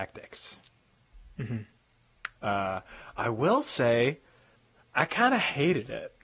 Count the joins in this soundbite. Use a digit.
0